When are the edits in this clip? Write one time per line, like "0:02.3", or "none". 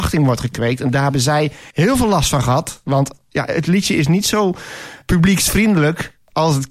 0:01.7

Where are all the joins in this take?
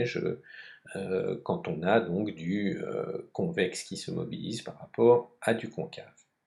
none

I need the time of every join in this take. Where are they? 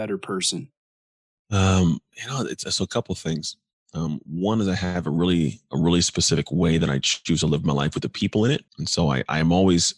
0:08.7

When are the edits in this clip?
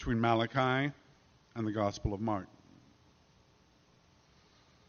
none

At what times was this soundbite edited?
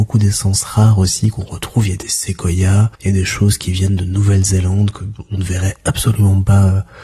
0:02.9

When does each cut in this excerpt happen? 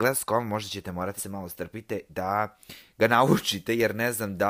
0:01.2
0:02.1

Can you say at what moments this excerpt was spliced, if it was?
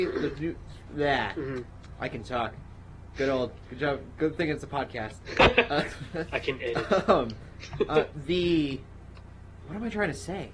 0:09.6

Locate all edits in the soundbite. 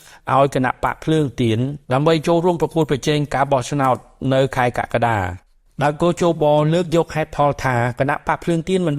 0:01.8

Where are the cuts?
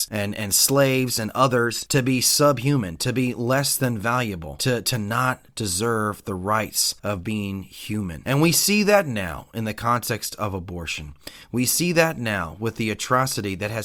0:07.0

